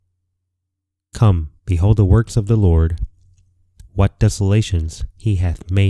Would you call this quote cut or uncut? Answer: cut